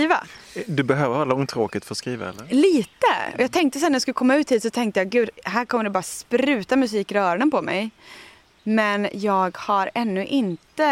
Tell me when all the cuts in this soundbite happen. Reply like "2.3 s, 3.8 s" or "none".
none